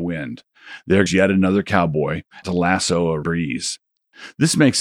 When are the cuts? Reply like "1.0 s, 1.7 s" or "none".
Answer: 1.1 s, 2.4 s, 3.2 s